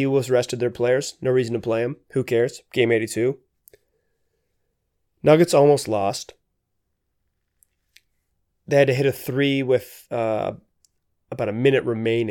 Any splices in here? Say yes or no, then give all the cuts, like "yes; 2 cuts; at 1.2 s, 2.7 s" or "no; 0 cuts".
no; 0 cuts